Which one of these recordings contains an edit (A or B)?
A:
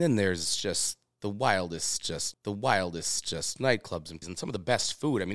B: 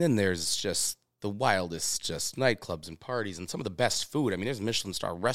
A